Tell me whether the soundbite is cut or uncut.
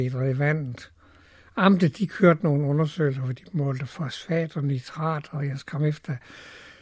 uncut